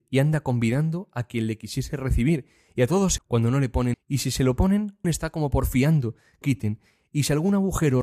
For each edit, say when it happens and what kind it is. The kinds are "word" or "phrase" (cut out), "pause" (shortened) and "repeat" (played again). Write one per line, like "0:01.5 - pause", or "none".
0:03.2 - word
0:03.9 - word
0:05.0 - word
0:06.4 - phrase